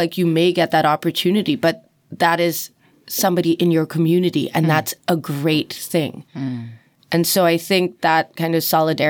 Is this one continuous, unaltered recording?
yes; 0 cuts

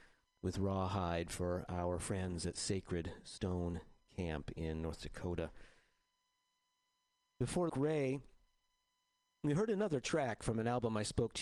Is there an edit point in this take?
yes; 1 cut; at 7.7 s

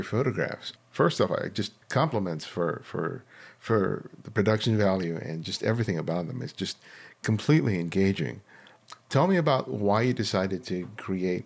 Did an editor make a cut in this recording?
yes; 1 cut; at 1.8 s

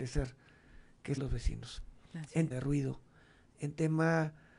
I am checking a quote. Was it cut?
yes; 2 cuts; at 1.2 s, 2.5 s

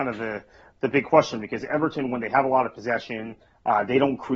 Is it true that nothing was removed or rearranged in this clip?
yes; 0 cuts

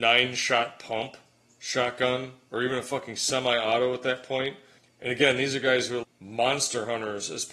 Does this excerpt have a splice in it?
yes; 2 cuts; at 4.8 s, 6.0 s

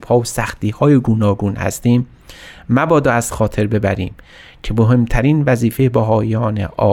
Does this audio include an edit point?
no; 0 cuts

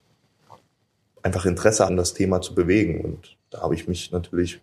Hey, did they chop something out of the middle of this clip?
yes; 1 cut; at 1.9 s

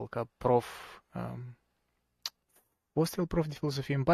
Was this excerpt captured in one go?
no; 1 cut; at 2.5 s

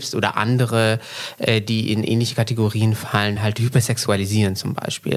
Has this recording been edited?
no; 0 cuts

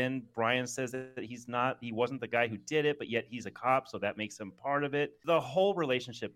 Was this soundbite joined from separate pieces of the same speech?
no; 0 cuts

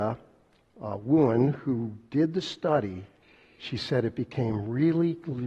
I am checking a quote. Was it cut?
no; 0 cuts

